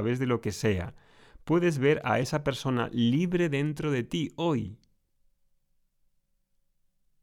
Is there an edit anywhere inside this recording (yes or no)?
no